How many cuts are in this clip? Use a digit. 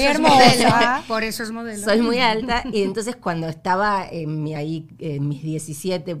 1